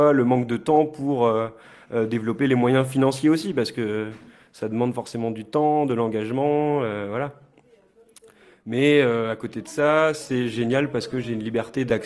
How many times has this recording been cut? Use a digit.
0